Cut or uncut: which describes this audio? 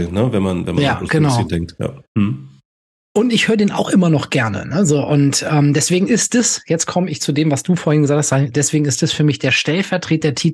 uncut